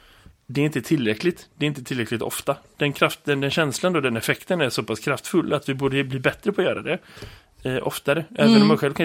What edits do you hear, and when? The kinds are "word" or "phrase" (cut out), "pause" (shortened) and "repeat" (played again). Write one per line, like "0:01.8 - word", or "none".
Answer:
none